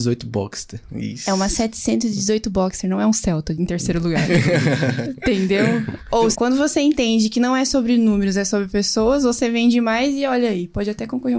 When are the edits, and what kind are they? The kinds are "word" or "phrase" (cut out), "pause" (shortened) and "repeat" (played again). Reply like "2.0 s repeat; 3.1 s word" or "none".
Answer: 6.3 s word